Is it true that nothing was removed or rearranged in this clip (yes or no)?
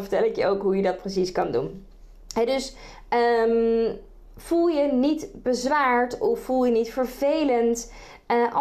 yes